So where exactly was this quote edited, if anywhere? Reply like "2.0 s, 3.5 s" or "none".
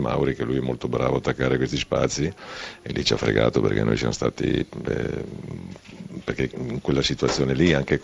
none